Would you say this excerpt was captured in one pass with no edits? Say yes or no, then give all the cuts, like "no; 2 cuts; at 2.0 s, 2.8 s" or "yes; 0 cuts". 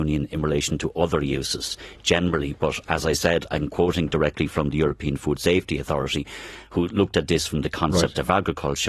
yes; 0 cuts